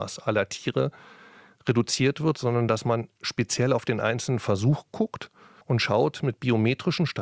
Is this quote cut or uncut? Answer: uncut